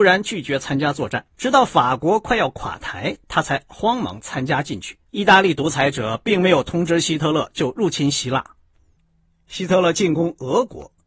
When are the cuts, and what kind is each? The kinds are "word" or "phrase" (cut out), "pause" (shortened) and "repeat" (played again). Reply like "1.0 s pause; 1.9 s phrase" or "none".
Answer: 1.3 s pause; 5.1 s pause